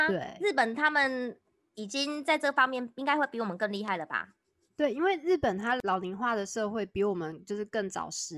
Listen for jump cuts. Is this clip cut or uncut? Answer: uncut